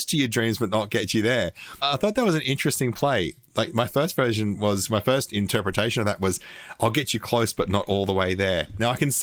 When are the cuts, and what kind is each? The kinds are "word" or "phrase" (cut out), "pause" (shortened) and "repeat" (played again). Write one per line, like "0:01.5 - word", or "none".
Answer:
none